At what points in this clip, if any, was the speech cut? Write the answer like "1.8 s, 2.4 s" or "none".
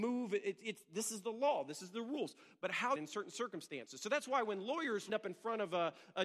3.0 s, 5.1 s